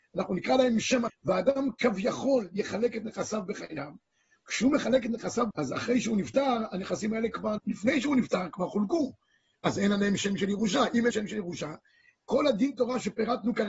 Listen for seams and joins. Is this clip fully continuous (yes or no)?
no